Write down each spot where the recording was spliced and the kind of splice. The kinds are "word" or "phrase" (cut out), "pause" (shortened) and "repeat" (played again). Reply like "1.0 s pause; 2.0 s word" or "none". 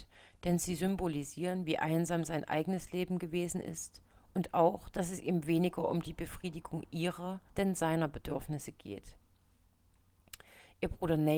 7.5 s pause